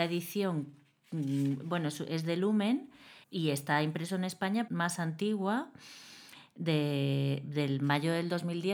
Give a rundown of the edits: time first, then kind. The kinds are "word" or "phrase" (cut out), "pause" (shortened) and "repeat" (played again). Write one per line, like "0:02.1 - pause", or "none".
0:03.2 - pause
0:04.7 - phrase